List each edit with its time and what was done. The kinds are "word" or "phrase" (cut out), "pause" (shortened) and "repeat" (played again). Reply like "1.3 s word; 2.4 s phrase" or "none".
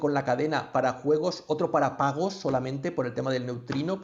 none